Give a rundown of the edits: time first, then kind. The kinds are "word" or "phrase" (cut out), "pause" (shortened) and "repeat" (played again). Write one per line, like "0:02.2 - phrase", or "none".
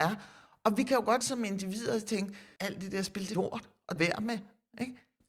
0:01.2 - word
0:02.6 - word
0:03.3 - phrase
0:04.0 - phrase